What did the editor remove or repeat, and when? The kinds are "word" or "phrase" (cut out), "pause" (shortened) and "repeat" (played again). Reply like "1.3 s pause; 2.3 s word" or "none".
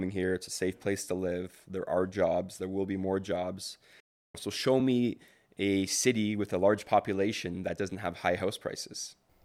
none